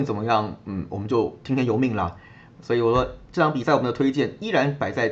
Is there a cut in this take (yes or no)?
no